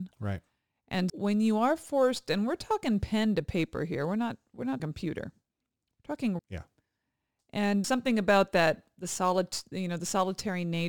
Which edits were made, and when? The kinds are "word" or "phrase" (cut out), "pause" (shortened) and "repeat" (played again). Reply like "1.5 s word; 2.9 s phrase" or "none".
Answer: 1.1 s word; 4.8 s word; 6.4 s word; 7.8 s word